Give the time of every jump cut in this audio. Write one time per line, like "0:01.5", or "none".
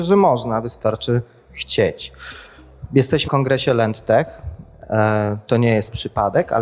0:03.3